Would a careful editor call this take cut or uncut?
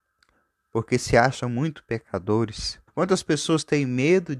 cut